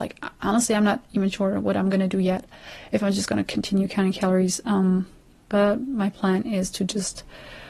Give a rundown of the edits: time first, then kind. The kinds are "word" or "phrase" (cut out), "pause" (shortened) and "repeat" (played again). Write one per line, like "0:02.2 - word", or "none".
none